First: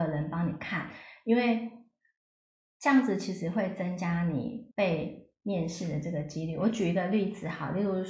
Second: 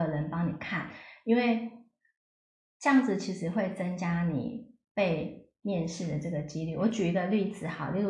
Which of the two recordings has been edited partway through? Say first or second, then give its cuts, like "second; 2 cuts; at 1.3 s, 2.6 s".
first; 1 cut; at 4.7 s